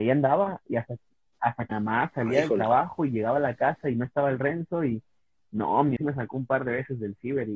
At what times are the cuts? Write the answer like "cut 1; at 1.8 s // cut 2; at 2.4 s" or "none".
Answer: cut 1; at 1.7 s // cut 2; at 6.0 s